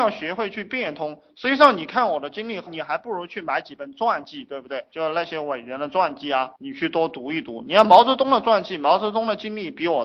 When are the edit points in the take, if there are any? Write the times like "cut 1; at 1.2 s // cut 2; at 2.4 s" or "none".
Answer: cut 1; at 6.6 s